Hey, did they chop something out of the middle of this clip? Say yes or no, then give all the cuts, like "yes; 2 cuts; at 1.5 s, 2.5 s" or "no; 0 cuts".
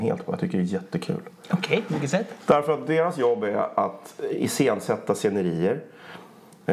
no; 0 cuts